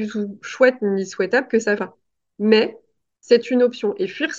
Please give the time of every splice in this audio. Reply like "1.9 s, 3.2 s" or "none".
1.8 s